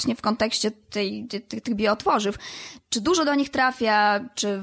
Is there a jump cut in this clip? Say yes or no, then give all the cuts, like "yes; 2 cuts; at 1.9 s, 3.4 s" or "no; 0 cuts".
yes; 1 cut; at 2.8 s